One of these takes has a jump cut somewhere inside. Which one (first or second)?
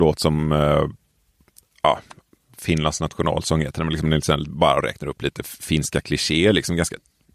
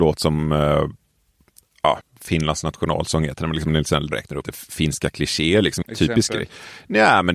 second